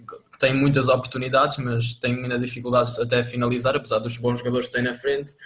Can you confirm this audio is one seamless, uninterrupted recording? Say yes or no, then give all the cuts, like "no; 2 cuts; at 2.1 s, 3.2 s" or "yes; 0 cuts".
yes; 0 cuts